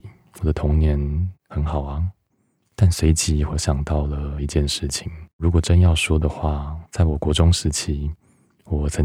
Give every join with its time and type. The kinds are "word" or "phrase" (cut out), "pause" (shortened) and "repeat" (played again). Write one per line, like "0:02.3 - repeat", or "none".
0:02.3 - pause
0:05.3 - pause
0:06.9 - pause